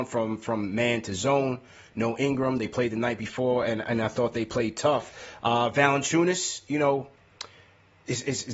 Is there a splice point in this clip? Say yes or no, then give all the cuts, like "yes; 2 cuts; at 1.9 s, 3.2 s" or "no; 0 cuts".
no; 0 cuts